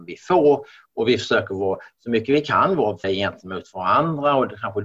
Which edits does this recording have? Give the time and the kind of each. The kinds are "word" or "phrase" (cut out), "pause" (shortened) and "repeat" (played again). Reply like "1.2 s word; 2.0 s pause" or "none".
3.0 s word